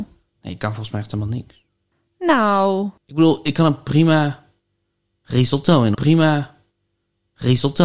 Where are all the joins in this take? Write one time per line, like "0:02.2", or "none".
0:03.0
0:05.9

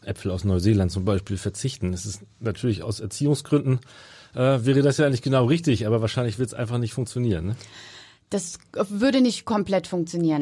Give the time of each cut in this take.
none

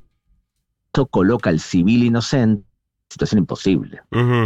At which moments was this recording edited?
none

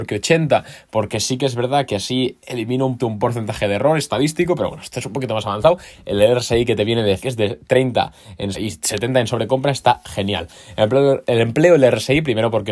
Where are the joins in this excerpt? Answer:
0:03.0
0:07.2
0:08.5

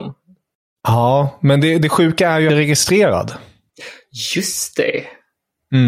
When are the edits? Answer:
0:02.5

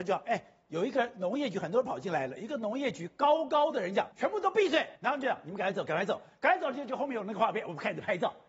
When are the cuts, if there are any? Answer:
0:04.1
0:05.0

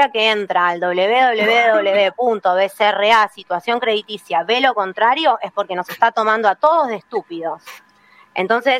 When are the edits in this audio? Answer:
none

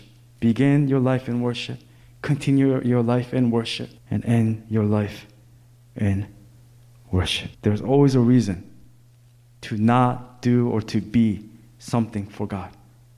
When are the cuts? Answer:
0:04.0
0:07.5

